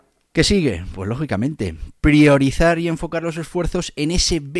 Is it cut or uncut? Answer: uncut